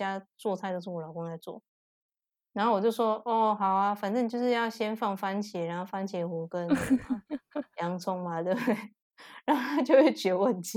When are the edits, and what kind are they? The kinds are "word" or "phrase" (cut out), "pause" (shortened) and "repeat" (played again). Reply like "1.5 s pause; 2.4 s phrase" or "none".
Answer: none

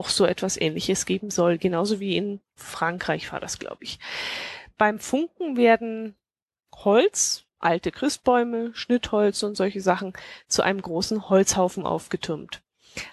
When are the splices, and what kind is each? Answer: 7.5 s pause

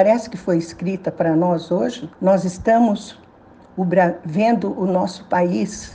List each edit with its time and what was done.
2.1 s pause

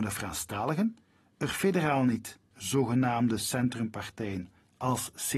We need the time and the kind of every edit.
2.5 s word

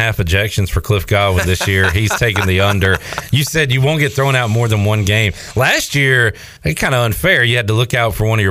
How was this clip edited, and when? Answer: 6.6 s pause

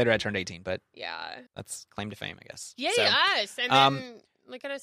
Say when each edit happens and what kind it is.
1.5 s pause

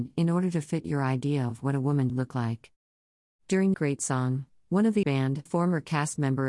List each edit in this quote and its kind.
2.1 s word; 3.7 s word; 5.0 s word; 5.5 s word

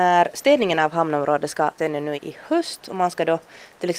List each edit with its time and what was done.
1.8 s word; 2.1 s word

